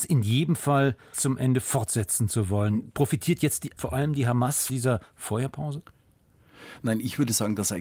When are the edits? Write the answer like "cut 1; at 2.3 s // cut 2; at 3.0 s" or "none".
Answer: cut 1; at 1.1 s // cut 2; at 3.8 s // cut 3; at 4.7 s